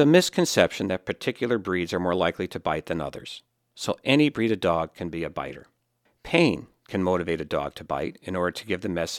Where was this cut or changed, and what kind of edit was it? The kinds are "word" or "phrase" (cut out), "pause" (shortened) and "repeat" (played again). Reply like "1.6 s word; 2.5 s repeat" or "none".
none